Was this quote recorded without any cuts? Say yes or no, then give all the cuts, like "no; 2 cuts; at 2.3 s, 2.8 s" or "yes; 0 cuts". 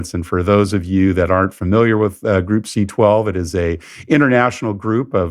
yes; 0 cuts